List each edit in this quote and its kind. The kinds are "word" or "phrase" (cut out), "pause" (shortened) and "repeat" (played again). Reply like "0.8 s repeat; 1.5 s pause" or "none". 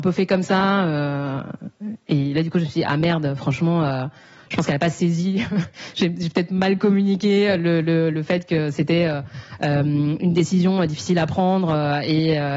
none